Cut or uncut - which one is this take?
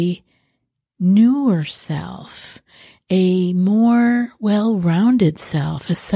uncut